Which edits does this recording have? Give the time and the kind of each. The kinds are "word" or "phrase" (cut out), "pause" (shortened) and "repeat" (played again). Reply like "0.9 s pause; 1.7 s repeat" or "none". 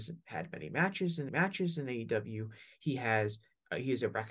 1.3 s repeat